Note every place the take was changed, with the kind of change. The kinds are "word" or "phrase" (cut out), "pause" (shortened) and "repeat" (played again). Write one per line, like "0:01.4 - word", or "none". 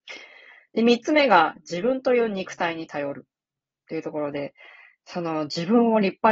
none